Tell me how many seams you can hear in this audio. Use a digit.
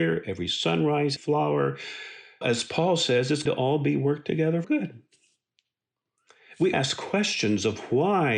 5